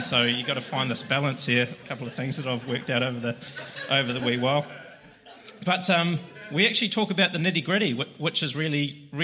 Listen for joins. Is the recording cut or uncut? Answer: uncut